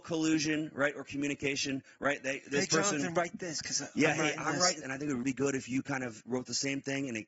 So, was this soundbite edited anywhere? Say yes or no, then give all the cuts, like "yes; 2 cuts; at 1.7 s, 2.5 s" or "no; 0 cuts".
yes; 2 cuts; at 4.8 s, 5.2 s